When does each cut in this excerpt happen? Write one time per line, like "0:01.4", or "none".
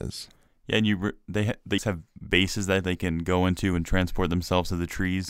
0:01.8